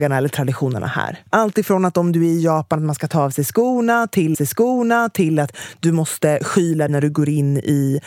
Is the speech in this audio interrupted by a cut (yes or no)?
yes